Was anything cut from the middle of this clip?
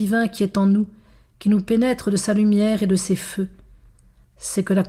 no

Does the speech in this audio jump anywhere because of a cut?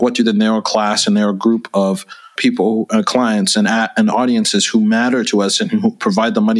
yes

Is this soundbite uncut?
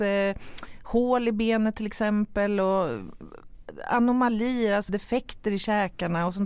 no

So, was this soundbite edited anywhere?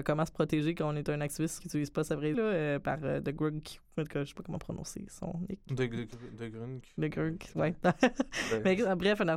yes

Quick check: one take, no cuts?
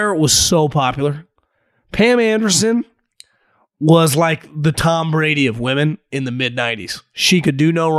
yes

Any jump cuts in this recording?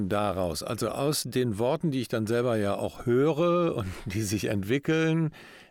no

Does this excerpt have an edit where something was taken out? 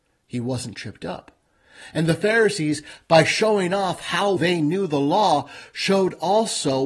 yes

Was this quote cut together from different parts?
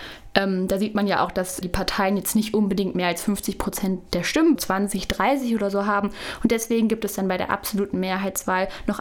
yes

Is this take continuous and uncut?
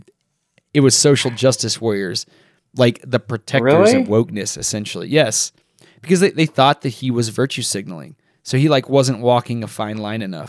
yes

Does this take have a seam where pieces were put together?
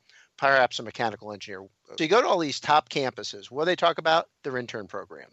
yes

